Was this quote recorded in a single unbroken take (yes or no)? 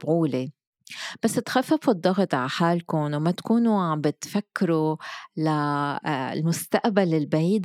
yes